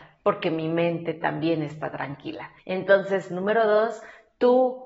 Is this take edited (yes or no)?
yes